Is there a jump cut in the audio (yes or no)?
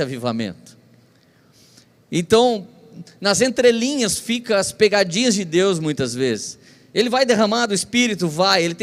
no